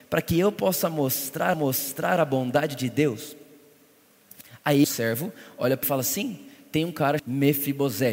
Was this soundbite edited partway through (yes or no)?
yes